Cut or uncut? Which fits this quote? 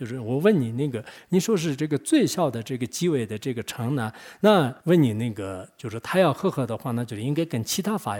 cut